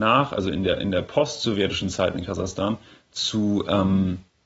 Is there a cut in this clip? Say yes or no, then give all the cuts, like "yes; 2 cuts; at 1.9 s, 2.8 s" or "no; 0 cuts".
no; 0 cuts